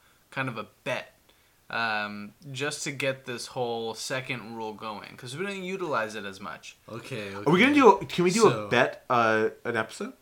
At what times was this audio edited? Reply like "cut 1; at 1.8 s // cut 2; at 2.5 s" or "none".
none